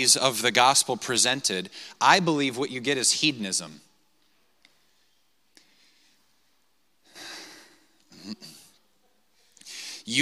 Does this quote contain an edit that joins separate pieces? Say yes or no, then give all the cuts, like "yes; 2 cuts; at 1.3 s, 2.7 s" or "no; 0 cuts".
no; 0 cuts